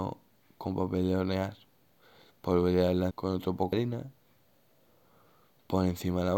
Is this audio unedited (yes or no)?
no